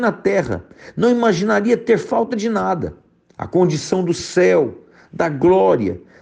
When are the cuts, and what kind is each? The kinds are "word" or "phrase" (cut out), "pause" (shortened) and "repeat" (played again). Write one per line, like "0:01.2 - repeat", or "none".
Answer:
none